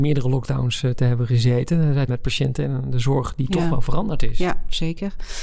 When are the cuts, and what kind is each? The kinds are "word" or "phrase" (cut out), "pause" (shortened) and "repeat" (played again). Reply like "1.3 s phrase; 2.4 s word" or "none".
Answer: 2.1 s word